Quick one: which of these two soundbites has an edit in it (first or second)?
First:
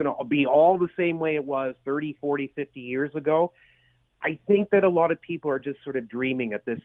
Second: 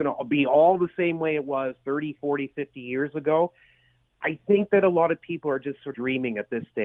second